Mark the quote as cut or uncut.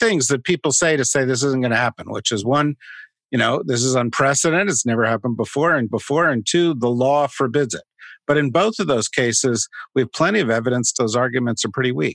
cut